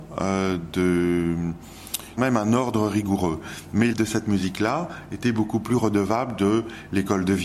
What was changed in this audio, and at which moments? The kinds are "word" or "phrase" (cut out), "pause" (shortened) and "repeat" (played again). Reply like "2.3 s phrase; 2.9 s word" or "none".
2.2 s phrase; 3.9 s word